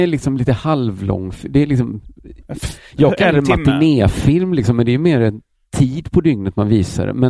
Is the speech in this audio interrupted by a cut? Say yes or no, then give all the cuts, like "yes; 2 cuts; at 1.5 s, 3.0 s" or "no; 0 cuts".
no; 0 cuts